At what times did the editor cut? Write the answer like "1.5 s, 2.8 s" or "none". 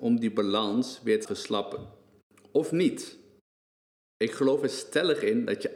1.2 s, 2.2 s